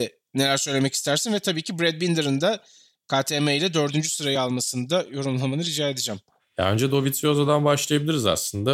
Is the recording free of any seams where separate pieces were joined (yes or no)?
yes